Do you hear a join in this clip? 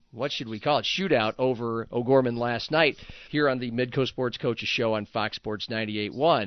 yes; 1 cut; at 3.3 s

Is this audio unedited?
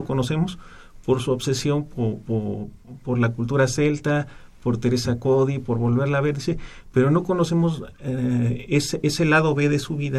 yes; 0 cuts

